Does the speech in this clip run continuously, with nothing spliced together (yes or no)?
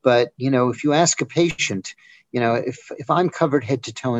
yes